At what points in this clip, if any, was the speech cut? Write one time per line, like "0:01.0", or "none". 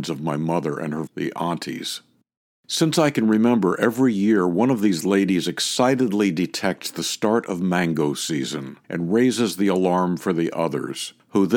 0:01.1
0:08.8